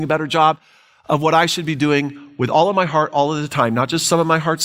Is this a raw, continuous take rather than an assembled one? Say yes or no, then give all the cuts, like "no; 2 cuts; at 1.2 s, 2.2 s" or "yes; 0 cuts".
yes; 0 cuts